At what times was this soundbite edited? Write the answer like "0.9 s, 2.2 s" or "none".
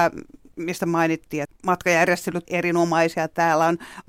1.4 s, 2.5 s